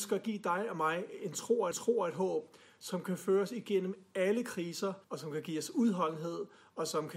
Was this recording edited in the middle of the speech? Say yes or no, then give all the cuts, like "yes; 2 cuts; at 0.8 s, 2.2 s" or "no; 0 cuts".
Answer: yes; 2 cuts; at 1.7 s, 5.0 s